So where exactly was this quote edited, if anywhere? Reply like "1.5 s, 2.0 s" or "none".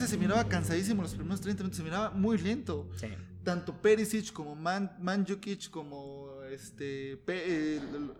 none